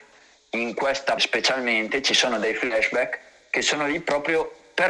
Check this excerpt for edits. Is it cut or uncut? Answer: cut